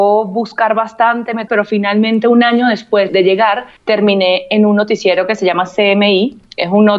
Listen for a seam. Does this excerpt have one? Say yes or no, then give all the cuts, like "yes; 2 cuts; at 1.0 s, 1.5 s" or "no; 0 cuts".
yes; 3 cuts; at 1.5 s, 3.1 s, 3.8 s